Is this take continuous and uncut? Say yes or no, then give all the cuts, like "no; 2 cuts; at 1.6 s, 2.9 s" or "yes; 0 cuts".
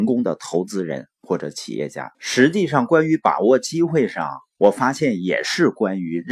no; 1 cut; at 2.1 s